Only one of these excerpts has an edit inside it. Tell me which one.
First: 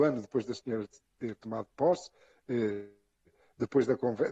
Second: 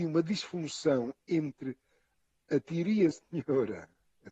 second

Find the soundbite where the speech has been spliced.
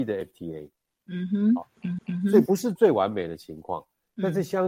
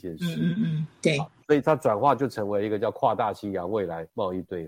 first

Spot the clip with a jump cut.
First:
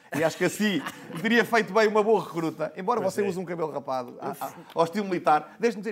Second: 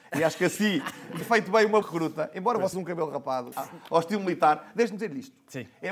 second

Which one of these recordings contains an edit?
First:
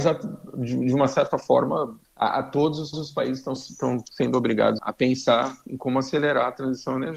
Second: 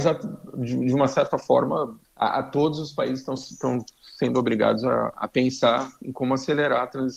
first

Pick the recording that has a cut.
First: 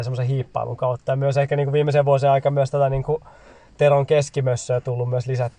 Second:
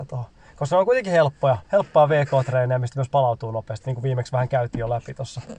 second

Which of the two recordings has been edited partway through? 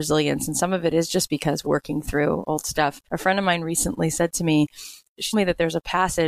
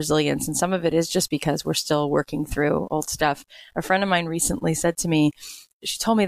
first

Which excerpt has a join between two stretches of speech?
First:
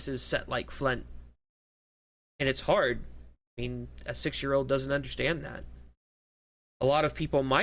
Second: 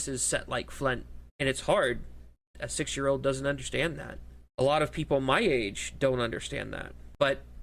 second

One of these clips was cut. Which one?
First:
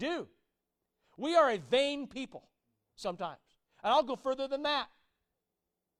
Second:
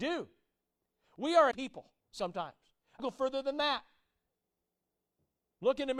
second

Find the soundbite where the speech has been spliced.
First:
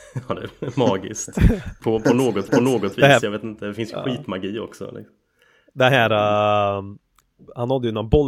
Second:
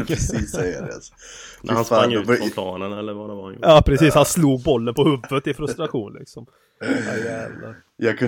first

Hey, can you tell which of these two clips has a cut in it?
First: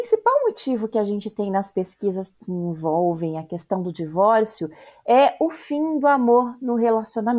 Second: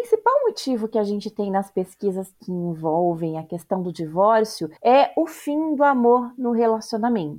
second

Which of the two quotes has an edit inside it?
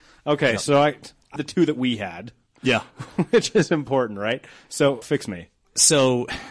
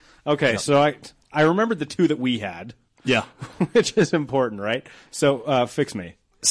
first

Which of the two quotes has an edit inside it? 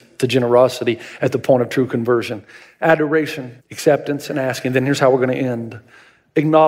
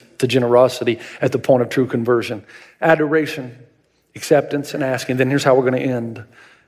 first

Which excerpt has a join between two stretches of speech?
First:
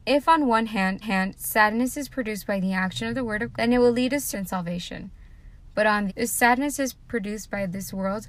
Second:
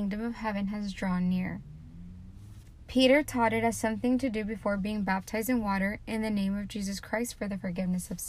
first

